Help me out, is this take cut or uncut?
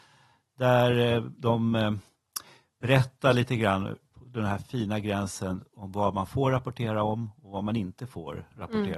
uncut